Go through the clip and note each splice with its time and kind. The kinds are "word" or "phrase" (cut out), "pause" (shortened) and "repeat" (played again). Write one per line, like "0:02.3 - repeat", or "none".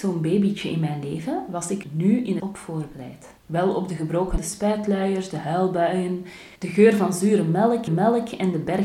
0:01.8 - word
0:02.4 - phrase
0:03.4 - pause
0:04.4 - word
0:06.6 - pause
0:07.9 - repeat